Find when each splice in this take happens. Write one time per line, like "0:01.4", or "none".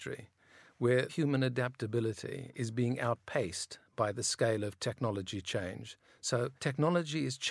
0:01.1
0:06.6